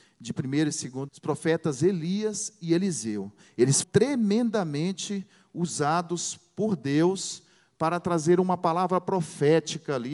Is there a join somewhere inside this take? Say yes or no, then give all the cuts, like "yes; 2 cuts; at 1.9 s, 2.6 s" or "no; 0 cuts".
yes; 2 cuts; at 1.1 s, 3.8 s